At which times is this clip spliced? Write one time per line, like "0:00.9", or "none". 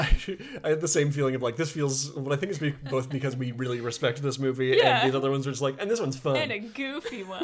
0:02.2
0:02.6